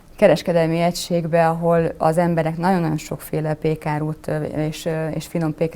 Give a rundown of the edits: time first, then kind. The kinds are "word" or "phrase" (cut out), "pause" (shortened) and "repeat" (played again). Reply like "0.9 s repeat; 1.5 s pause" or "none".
none